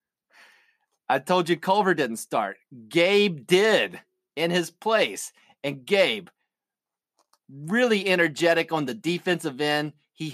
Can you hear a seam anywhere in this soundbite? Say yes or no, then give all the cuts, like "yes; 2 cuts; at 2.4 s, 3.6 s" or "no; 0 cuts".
no; 0 cuts